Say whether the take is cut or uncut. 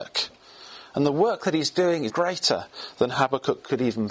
cut